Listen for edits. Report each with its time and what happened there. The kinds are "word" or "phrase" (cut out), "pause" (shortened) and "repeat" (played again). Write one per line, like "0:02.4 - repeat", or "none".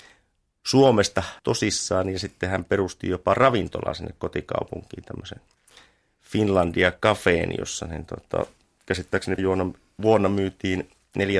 0:01.4 - pause
0:09.4 - word